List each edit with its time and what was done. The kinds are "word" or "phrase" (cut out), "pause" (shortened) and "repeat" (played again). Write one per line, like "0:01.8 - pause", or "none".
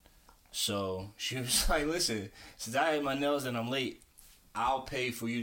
none